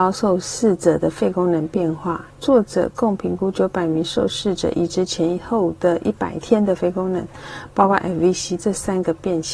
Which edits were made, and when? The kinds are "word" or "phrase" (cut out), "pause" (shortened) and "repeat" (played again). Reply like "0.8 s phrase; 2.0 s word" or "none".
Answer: 8.0 s word; 8.6 s word

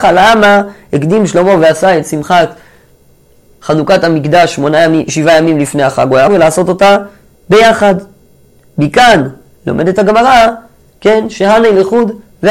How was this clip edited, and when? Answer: 6.3 s phrase

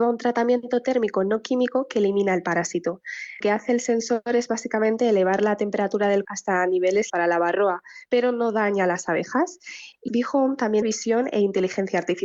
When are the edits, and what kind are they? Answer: 3.4 s word; 6.2 s word; 7.1 s word; 10.1 s word; 10.8 s word

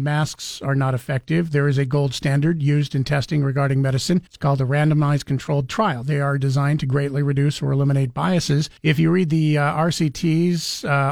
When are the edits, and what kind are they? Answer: 4.3 s pause; 8.8 s pause

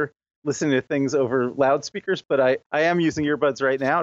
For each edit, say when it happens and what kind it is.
2.7 s pause

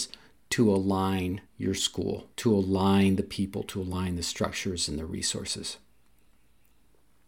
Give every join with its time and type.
1.5 s pause; 2.3 s pause

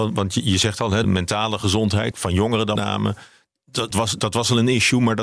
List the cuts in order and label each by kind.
1.0 s word; 2.1 s word; 2.8 s word; 3.9 s word

